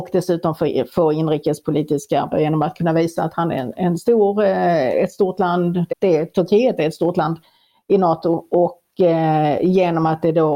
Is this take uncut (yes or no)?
no